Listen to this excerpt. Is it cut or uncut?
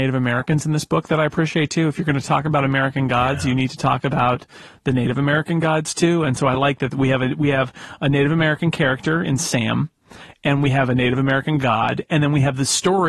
uncut